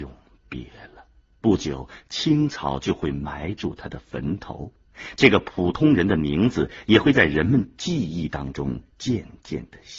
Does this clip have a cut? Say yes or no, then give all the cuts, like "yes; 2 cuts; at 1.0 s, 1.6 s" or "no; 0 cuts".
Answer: yes; 2 cuts; at 1.2 s, 8.9 s